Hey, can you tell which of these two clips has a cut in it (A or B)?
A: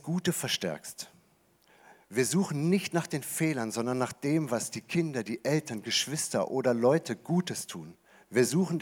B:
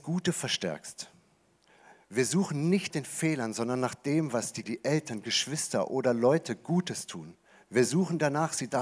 B